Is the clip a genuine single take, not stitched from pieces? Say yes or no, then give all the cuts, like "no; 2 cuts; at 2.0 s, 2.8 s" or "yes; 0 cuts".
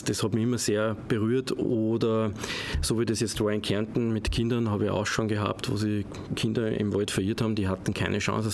yes; 0 cuts